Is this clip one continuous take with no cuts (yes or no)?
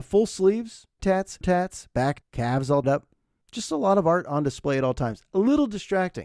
no